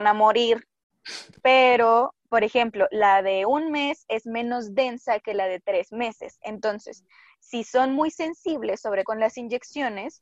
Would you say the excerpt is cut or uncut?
cut